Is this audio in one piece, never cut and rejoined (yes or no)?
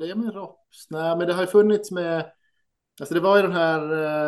yes